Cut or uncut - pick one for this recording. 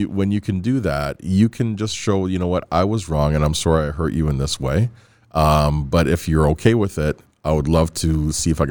uncut